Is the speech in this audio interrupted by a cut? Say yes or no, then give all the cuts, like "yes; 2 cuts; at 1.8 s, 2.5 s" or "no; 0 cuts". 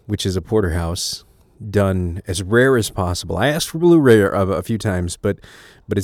no; 0 cuts